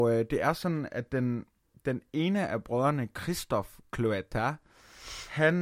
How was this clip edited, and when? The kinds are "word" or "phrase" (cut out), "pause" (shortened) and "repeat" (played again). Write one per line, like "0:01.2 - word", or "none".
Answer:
none